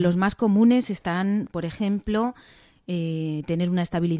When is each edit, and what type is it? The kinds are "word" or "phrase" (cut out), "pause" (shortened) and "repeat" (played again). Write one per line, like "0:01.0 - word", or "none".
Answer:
none